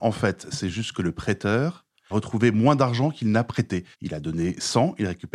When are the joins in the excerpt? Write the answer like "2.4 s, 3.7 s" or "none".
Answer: 2.1 s, 3.9 s